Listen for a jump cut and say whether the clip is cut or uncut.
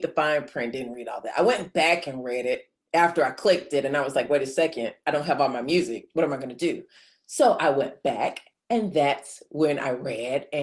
uncut